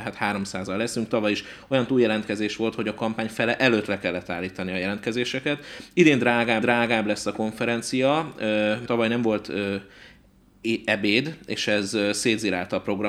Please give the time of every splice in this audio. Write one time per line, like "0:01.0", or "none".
0:06.6
0:08.9